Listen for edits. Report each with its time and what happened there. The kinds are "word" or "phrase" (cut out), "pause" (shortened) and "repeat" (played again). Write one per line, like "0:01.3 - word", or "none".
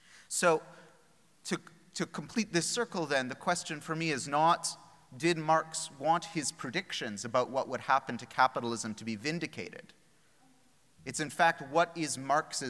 none

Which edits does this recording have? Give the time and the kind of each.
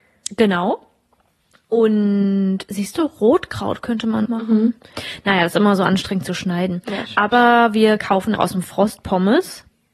0:04.3 - phrase
0:08.4 - word

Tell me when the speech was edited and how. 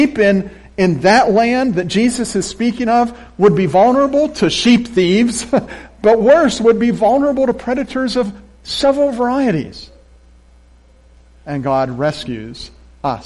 none

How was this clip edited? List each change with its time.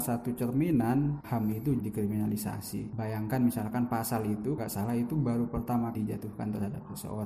0:01.2 - phrase
0:01.8 - phrase
0:04.6 - word
0:05.9 - word

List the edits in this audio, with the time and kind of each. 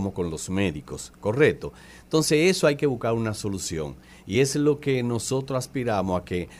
none

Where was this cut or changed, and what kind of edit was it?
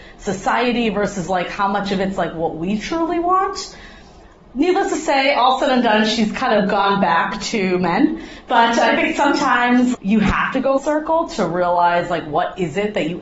0:09.9 - word
0:10.8 - word

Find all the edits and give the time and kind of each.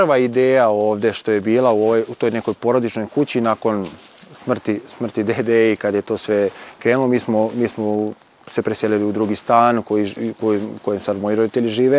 none

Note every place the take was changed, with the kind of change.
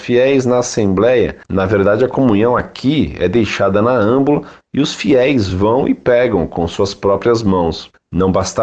none

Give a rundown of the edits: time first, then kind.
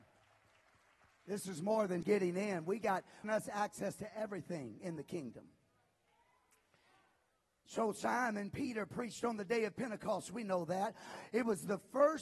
0:02.0 - word
0:03.2 - phrase

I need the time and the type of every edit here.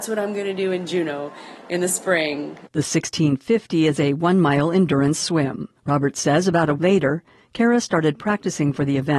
0:02.7 - pause
0:05.8 - pause
0:06.8 - word

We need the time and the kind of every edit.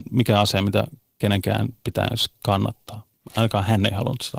none

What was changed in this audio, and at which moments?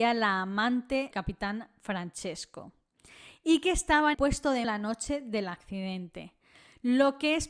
0:01.1 - word
0:04.1 - word
0:04.6 - word

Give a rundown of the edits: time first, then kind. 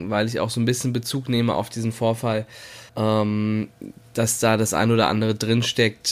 0:02.9 - pause

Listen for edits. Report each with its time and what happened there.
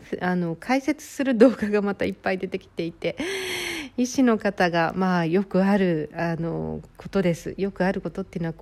0:06.9 - pause

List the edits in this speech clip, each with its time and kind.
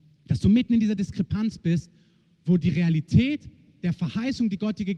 none

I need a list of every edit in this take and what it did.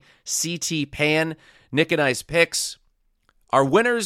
none

